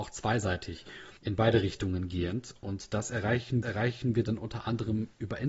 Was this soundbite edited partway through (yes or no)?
yes